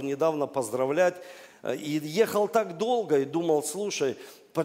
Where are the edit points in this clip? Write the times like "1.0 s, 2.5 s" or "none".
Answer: none